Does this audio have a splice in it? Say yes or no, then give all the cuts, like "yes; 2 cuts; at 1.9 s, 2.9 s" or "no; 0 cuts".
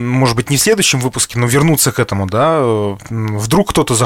no; 0 cuts